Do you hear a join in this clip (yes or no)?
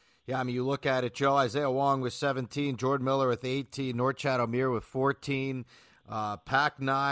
no